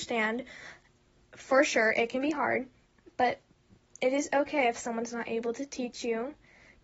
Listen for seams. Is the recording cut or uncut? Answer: uncut